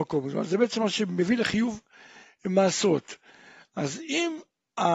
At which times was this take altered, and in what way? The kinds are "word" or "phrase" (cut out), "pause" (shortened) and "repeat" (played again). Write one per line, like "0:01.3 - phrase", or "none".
none